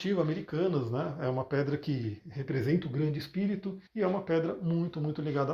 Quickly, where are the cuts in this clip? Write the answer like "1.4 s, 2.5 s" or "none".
3.9 s